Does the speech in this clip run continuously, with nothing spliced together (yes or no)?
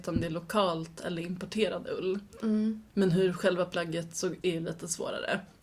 no